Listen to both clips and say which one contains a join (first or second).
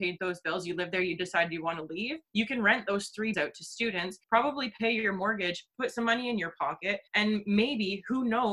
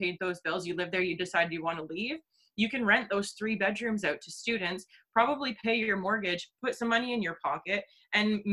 first